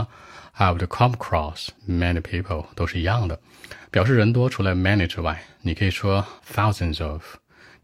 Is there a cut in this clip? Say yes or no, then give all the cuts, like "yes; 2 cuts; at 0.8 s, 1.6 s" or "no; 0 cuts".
yes; 2 cuts; at 1.8 s, 6.4 s